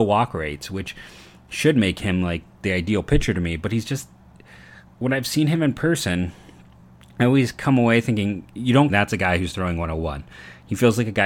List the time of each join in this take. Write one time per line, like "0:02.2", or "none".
0:08.9